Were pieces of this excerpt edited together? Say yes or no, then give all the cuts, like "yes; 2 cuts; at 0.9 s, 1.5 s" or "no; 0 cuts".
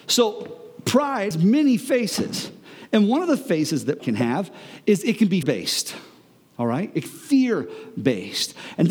yes; 4 cuts; at 1.3 s, 4.0 s, 5.4 s, 7.1 s